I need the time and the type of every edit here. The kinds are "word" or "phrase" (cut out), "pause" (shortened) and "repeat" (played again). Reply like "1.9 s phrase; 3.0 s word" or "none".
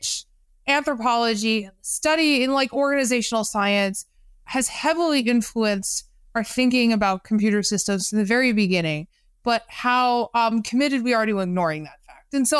none